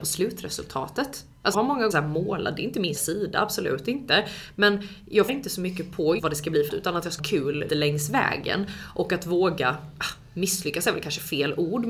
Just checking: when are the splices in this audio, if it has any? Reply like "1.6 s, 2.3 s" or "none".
1.5 s, 1.9 s, 3.0 s, 5.3 s, 6.2 s, 6.7 s, 7.2 s, 7.7 s